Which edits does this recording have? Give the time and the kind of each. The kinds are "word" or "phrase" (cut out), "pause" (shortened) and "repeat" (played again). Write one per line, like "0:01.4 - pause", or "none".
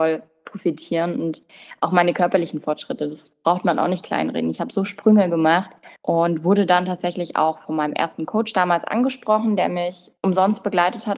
0:06.0 - pause
0:10.2 - pause

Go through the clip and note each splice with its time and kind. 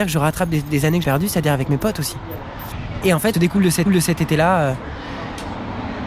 0:01.0 - word
0:03.3 - word
0:03.9 - repeat

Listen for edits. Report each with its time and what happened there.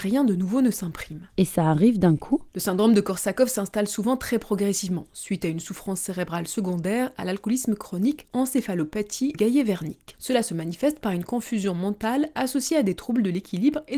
0:08.2 - word
0:09.3 - word

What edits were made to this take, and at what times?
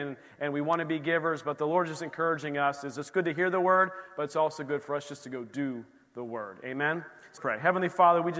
0:07.4 - word

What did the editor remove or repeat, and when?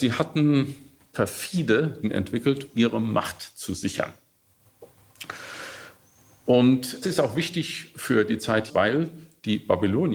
0:01.1 - word
0:02.0 - word
0:02.7 - word
0:07.0 - word
0:08.7 - word

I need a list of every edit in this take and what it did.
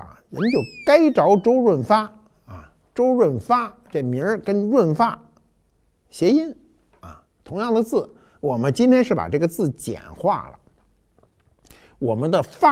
none

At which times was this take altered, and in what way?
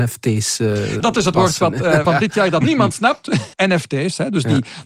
0:01.0 - word
0:01.3 - word
0:02.0 - word
0:02.6 - word
0:03.5 - word

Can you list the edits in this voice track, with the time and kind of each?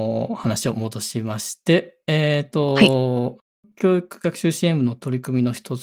none

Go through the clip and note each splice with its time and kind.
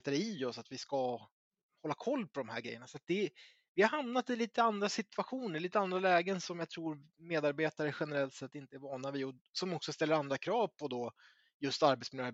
none

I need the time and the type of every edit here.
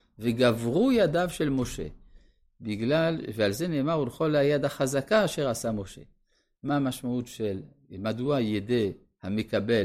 none

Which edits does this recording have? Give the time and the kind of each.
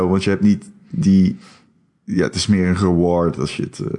none

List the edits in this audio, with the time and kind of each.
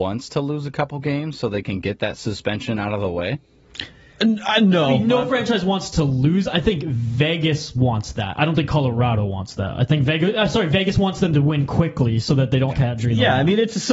0:12.7 - word

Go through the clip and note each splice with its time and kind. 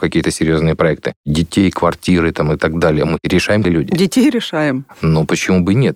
0:03.6 - phrase

